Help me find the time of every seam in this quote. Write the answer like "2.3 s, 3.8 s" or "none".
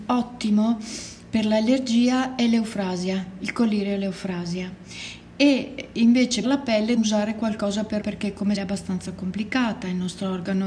6.4 s, 7.0 s, 8.0 s, 8.6 s

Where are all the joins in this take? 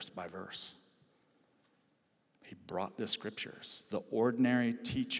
none

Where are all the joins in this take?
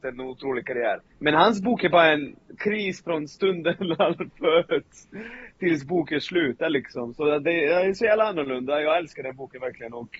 1.1 s

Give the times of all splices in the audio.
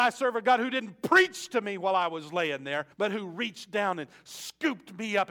2.9 s

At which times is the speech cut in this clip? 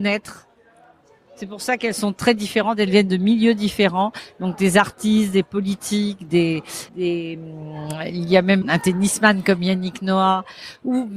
6.9 s, 8.6 s

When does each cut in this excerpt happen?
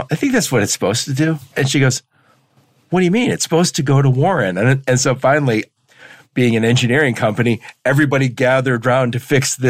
none

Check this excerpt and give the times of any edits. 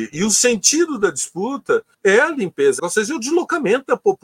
1.9 s, 2.8 s

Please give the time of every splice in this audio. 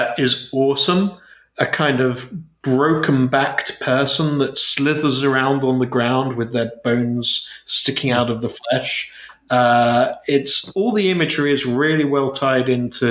none

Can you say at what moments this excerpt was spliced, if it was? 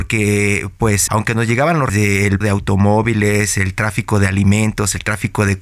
1.1 s, 1.9 s, 2.4 s

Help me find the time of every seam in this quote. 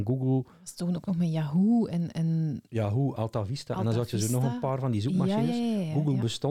none

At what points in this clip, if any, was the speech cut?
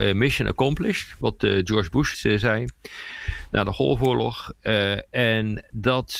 1.2 s, 2.1 s

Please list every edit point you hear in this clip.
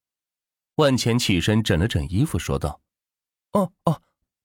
2.9 s

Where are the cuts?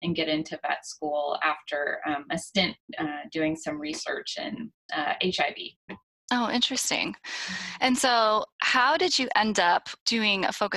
none

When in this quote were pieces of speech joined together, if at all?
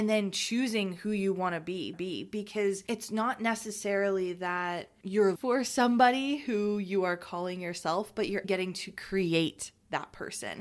1.9 s, 5.4 s, 8.4 s

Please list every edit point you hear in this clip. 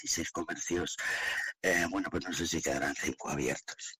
none

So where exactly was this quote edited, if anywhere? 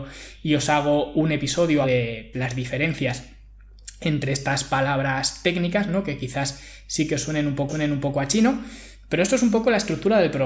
1.8 s, 2.3 s, 7.7 s

